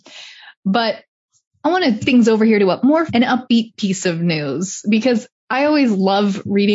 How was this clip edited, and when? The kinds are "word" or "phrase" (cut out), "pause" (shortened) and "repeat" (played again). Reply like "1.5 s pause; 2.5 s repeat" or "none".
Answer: 2.0 s word; 3.1 s word